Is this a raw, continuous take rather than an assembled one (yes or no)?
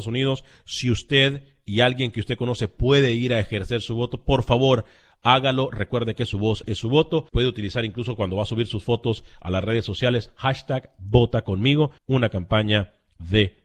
no